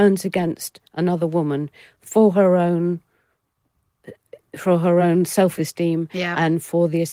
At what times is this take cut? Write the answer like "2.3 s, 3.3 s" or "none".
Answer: none

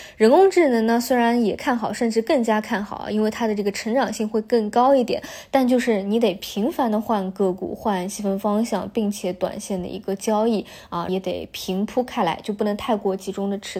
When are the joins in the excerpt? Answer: 11.1 s

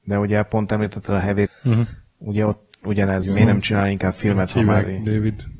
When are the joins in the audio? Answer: 1.5 s, 3.2 s

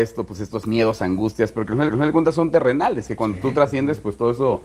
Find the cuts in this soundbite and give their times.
1.9 s

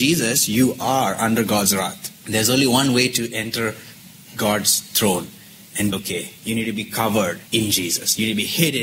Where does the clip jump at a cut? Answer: 2.2 s, 5.9 s, 6.4 s, 7.5 s

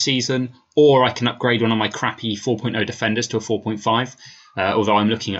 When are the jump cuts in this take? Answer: none

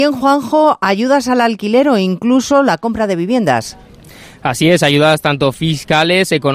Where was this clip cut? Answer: none

